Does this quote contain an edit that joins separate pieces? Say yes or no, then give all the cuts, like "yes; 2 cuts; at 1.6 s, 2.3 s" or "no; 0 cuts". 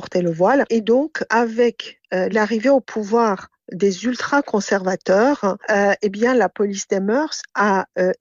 no; 0 cuts